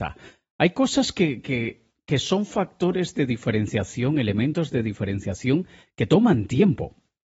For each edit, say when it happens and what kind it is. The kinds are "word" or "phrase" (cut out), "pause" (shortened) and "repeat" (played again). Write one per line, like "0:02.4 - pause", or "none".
none